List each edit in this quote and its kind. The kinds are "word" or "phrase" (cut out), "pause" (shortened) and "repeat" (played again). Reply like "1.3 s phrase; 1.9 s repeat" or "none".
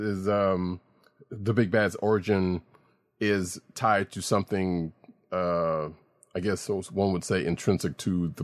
none